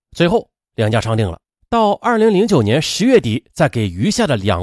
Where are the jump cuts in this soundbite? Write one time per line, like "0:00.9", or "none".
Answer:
0:01.6